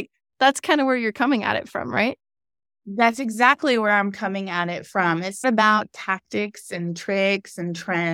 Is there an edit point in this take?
yes; 1 cut; at 5.4 s

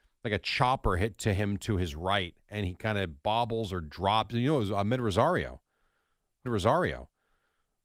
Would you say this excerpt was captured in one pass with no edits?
no; 1 cut; at 6.5 s

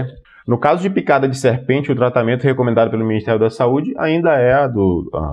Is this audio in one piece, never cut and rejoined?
yes; 0 cuts

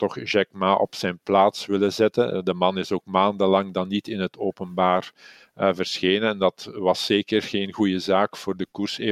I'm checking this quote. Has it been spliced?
no; 0 cuts

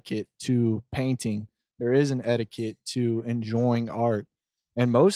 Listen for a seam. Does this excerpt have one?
no; 0 cuts

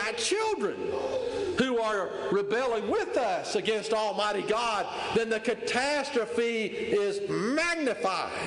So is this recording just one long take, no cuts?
yes; 0 cuts

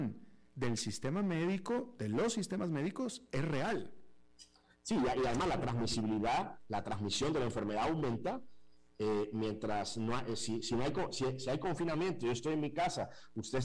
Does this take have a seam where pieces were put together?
no; 0 cuts

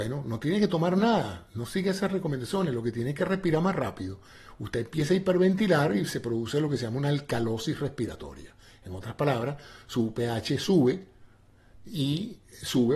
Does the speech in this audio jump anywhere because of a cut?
no; 0 cuts

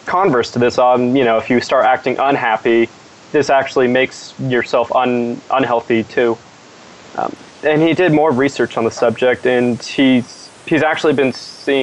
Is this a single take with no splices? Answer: yes; 0 cuts

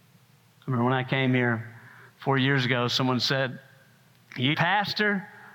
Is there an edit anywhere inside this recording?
yes; 1 cut; at 4.5 s

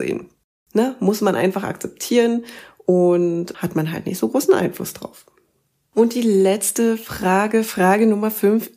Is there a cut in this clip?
no; 0 cuts

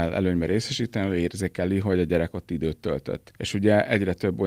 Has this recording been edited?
no; 0 cuts

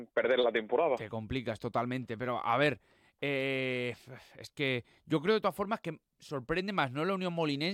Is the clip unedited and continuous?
yes; 0 cuts

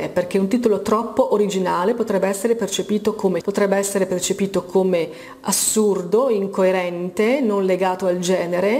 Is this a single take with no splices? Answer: no; 1 cut; at 3.4 s

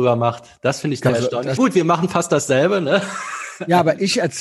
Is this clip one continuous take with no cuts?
no; 2 cuts; at 1.1 s, 1.6 s

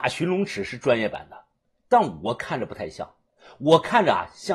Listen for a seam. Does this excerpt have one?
no; 0 cuts

